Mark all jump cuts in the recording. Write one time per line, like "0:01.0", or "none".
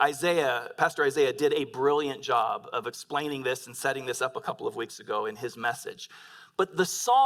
none